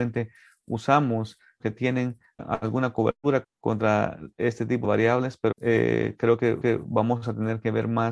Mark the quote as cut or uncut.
cut